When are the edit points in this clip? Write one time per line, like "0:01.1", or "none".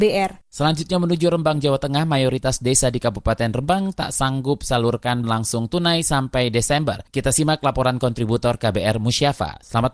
0:05.2